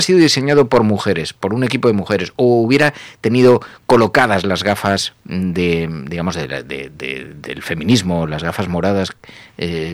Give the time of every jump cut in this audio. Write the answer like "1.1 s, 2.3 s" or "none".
none